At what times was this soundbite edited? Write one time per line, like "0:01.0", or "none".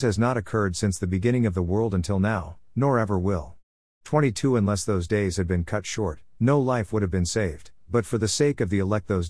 none